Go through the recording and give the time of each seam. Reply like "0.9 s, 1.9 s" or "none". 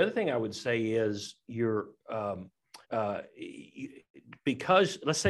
2.8 s

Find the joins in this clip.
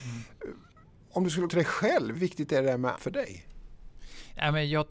1.5 s, 2.1 s, 3.0 s

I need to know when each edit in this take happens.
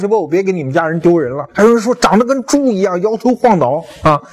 1.5 s

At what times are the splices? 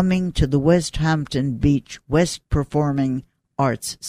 2.5 s

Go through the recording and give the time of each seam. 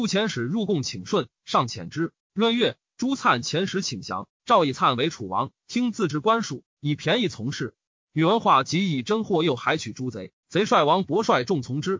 2.2 s

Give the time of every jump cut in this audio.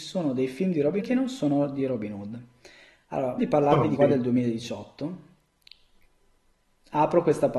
1.0 s, 3.4 s, 4.0 s

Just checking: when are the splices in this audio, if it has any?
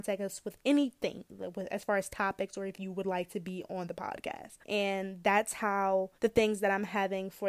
4.6 s, 6.2 s

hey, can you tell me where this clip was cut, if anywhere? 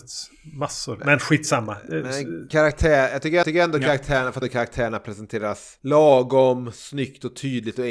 3.4 s, 4.4 s

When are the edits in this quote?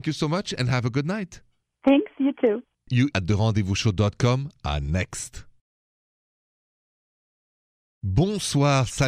3.1 s

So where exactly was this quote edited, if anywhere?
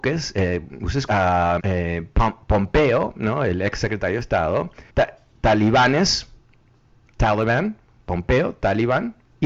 1.1 s, 1.6 s, 4.9 s

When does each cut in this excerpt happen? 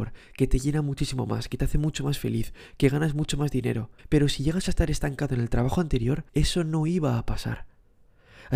4.0 s, 6.3 s

